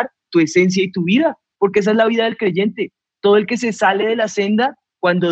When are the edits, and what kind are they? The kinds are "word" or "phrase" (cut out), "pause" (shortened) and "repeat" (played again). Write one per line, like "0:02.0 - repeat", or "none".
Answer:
none